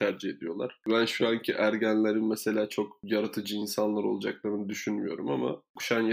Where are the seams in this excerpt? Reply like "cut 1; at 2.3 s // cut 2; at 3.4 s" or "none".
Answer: none